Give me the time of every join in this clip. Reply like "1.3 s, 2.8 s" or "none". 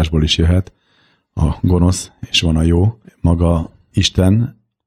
3.0 s